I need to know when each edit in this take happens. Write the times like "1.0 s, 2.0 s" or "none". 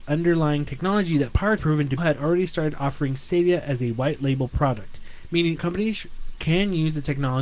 1.6 s, 2.0 s, 5.6 s